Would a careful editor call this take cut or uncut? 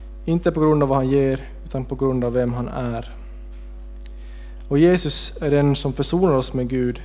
uncut